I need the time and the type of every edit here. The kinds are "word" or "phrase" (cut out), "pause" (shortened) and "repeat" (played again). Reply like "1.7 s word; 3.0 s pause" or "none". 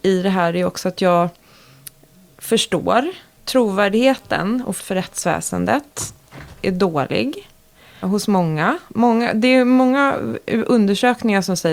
3.4 s word; 4.8 s word; 8.0 s word